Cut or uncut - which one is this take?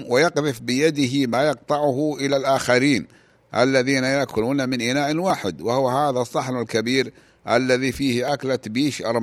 uncut